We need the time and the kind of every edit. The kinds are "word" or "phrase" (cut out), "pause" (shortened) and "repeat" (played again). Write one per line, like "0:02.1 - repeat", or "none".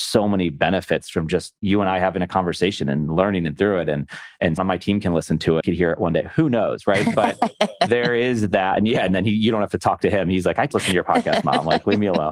0:03.6 - word
0:04.6 - word
0:05.6 - phrase
0:10.7 - word